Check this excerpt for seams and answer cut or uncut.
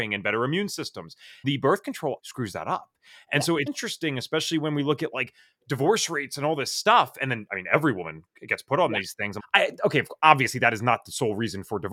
cut